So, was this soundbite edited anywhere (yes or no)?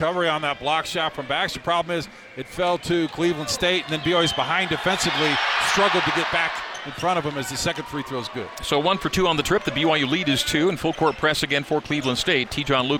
no